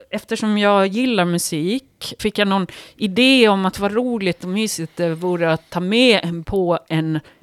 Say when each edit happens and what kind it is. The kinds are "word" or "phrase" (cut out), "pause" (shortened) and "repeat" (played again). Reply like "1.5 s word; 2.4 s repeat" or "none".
2.2 s word; 6.4 s word